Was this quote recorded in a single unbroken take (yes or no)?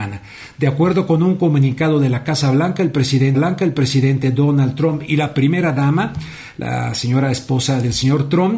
no